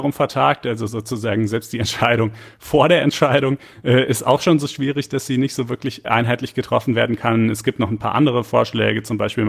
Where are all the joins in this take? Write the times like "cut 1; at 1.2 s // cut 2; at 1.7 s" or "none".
cut 1; at 6.0 s